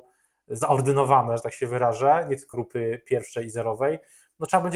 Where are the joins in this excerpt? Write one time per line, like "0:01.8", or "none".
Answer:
0:02.5

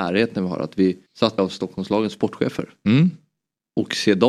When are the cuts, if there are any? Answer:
0:01.1
0:01.4

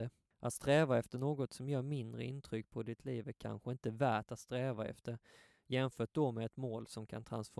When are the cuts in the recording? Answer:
none

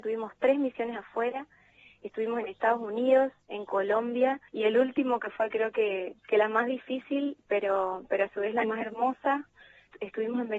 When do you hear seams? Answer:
0:04.5
0:06.2

